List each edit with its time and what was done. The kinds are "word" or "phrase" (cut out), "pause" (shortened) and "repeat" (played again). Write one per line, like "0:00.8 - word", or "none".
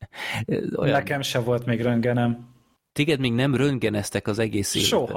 0:02.8 - pause